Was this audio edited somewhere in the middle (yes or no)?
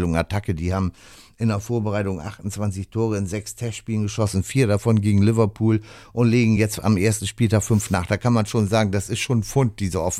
no